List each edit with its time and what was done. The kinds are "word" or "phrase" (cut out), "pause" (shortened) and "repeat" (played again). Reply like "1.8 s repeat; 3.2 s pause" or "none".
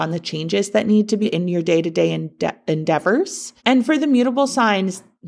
1.2 s word; 3.6 s pause